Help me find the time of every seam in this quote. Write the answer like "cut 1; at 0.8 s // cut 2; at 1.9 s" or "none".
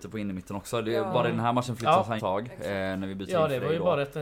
cut 1; at 2.2 s

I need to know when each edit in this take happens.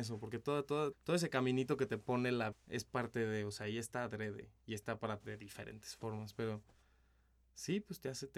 cut 1; at 0.9 s // cut 2; at 2.5 s // cut 3; at 5.2 s

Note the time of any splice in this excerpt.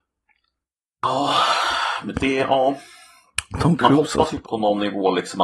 cut 1; at 2.1 s // cut 2; at 4.4 s

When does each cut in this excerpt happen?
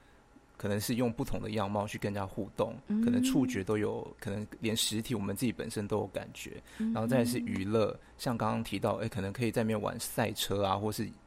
cut 1; at 4.2 s

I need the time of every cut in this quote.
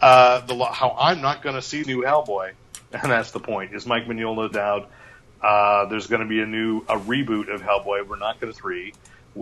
cut 1; at 1.8 s // cut 2; at 4.5 s // cut 3; at 8.5 s

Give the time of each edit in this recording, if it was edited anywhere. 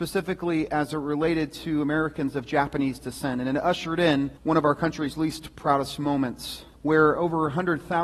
cut 1; at 4.4 s // cut 2; at 6.7 s

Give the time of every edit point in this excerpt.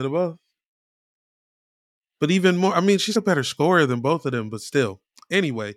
cut 1; at 3.1 s

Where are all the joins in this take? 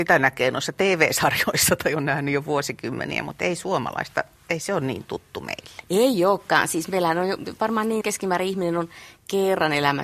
cut 1; at 8.0 s

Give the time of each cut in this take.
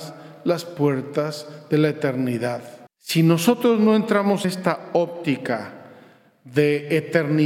cut 1; at 2.9 s // cut 2; at 4.4 s

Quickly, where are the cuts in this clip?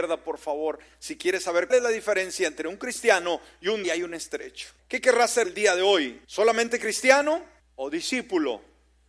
cut 1; at 1.7 s // cut 2; at 3.8 s // cut 3; at 4.8 s // cut 4; at 5.4 s // cut 5; at 6.2 s // cut 6; at 7.6 s

